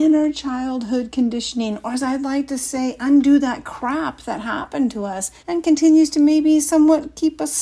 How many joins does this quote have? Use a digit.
1